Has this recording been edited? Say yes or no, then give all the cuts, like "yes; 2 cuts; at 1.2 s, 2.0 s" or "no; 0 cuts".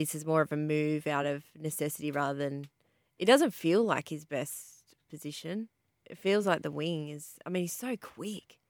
no; 0 cuts